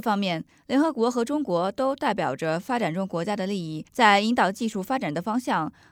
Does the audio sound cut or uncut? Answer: cut